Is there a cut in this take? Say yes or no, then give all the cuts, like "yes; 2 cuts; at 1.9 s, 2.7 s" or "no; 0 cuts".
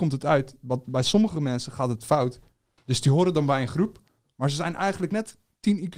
no; 0 cuts